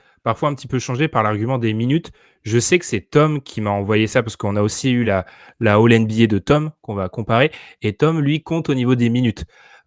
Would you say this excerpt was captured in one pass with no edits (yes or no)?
yes